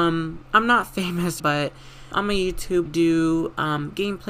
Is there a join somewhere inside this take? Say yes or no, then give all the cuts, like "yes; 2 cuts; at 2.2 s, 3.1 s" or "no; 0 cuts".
yes; 3 cuts; at 1.4 s, 2.1 s, 2.9 s